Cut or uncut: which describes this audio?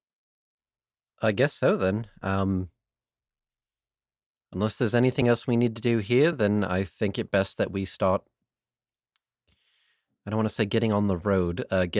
uncut